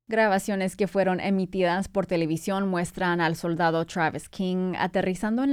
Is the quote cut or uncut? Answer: uncut